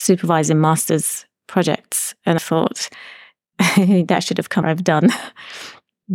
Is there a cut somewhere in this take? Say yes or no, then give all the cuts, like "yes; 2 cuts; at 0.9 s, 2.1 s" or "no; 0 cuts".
yes; 2 cuts; at 2.4 s, 4.6 s